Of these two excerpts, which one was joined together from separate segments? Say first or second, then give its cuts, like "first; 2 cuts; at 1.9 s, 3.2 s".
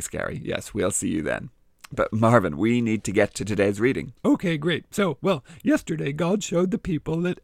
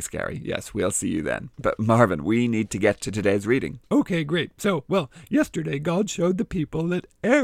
second; 1 cut; at 1.5 s